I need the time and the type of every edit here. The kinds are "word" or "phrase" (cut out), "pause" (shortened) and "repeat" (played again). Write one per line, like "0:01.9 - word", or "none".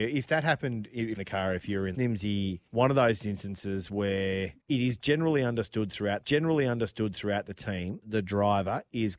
0:01.2 - phrase
0:01.9 - phrase
0:02.7 - pause
0:04.6 - pause
0:06.2 - repeat
0:08.0 - word